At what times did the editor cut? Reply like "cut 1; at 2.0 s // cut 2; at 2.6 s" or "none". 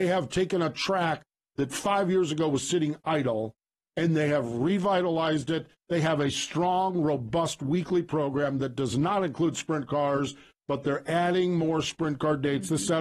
none